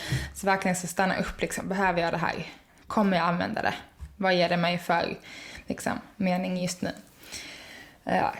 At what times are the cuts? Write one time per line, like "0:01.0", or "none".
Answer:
none